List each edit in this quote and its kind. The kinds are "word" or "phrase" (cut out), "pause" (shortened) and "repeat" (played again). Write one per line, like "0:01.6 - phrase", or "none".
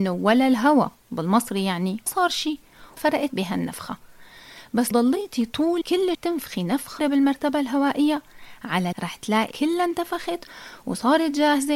0:02.1 - word
0:03.0 - word
0:03.3 - word
0:04.9 - word
0:05.8 - word
0:06.1 - word
0:07.0 - word
0:08.9 - word
0:09.5 - word